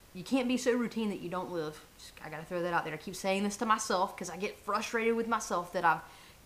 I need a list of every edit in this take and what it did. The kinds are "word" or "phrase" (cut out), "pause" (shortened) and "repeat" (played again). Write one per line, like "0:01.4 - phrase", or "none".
0:01.9 - pause